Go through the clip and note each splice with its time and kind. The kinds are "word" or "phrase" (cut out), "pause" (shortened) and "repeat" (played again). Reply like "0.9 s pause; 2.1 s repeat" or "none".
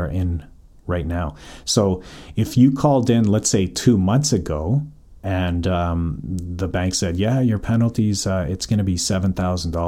5.2 s pause